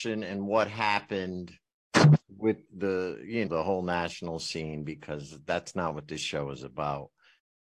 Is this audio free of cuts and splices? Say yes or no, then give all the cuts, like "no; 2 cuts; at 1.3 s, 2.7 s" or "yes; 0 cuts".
no; 2 cuts; at 2.7 s, 3.5 s